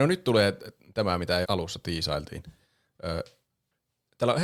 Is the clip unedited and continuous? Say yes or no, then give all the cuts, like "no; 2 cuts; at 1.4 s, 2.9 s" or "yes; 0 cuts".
no; 1 cut; at 1.4 s